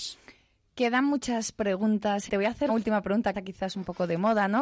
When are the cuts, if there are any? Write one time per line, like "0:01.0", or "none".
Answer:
0:02.3
0:02.7
0:03.3